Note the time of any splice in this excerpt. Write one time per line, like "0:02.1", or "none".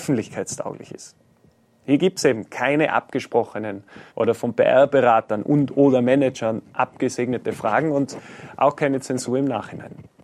0:04.1